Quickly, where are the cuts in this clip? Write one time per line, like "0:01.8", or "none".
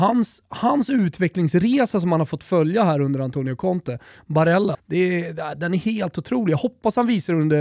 0:04.7